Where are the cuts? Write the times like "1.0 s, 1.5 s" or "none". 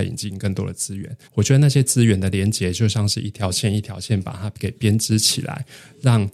1.2 s